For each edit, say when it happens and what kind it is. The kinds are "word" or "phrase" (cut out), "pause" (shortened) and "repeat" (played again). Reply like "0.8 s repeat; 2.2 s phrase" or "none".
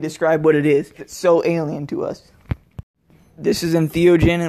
1.0 s word; 3.1 s pause